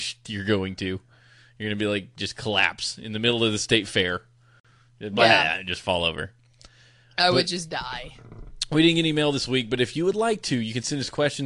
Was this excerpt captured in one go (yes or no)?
yes